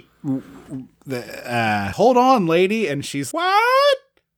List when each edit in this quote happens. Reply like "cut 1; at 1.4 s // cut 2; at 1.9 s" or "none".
cut 1; at 1.9 s // cut 2; at 3.3 s